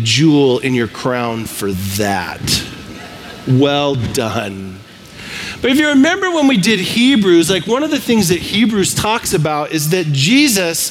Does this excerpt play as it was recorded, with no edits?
yes; 0 cuts

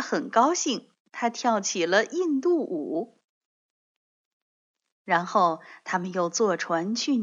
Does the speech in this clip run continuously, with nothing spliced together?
yes; 0 cuts

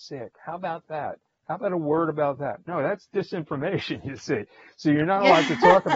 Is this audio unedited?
yes; 0 cuts

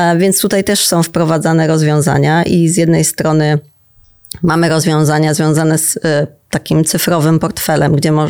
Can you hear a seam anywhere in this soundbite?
no; 0 cuts

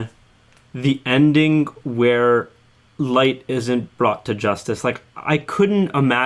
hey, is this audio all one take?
yes; 0 cuts

